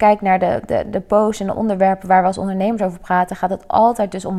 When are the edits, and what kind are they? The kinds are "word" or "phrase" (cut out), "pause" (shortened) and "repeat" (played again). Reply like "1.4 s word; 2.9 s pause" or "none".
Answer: none